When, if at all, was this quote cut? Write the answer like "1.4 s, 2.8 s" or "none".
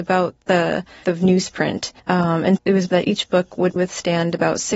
1.0 s, 2.0 s, 2.6 s, 2.9 s, 3.8 s